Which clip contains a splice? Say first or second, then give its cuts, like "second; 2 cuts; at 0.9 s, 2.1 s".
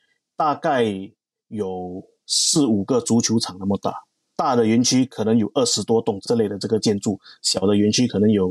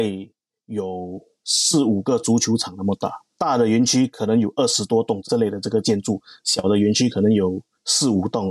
second; 1 cut; at 3.3 s